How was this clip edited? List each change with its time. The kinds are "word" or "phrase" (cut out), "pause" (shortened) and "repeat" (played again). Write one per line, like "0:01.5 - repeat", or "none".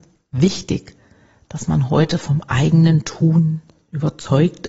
none